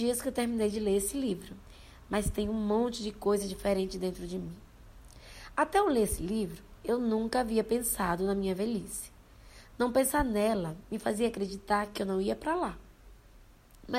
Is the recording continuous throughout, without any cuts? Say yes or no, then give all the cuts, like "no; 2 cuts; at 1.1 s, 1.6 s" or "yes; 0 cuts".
yes; 0 cuts